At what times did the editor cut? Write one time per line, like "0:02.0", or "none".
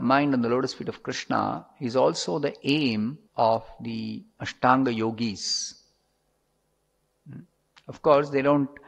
0:03.3